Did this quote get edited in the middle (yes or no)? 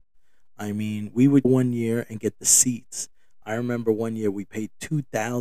yes